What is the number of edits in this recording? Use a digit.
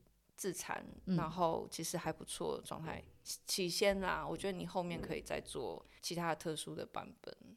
1